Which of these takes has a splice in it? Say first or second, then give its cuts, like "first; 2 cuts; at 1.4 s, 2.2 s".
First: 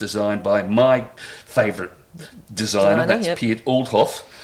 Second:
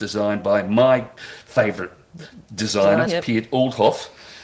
second; 1 cut; at 3.1 s